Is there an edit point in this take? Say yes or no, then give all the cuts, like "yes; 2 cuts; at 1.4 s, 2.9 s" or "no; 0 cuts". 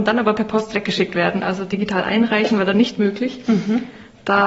no; 0 cuts